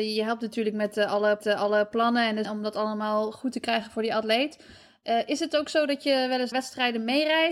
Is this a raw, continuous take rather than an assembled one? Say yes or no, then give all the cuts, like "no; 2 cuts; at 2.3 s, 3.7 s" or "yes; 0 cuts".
no; 3 cuts; at 1.4 s, 2.4 s, 6.5 s